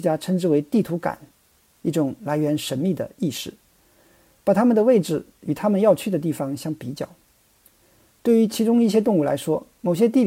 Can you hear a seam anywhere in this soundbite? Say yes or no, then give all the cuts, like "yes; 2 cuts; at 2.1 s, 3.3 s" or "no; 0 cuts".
no; 0 cuts